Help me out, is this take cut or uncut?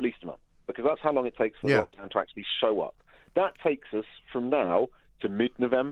uncut